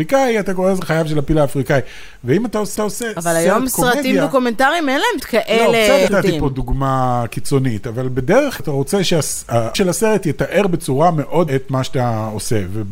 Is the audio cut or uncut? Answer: cut